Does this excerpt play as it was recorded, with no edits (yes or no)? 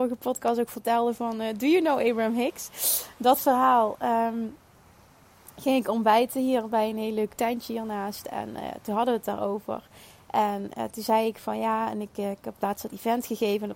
yes